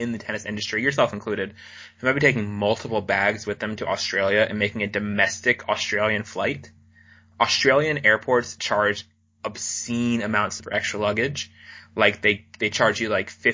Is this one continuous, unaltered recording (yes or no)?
no